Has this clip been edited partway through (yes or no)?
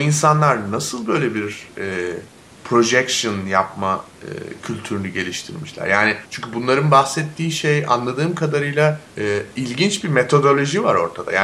yes